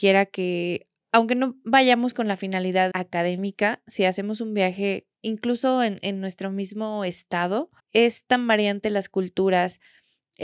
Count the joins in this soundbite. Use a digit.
3